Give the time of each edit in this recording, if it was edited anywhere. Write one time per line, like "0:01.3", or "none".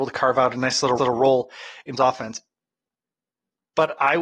0:01.0
0:02.0